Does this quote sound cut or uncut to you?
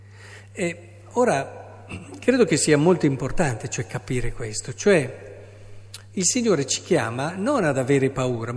uncut